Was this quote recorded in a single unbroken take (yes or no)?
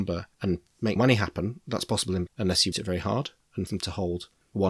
no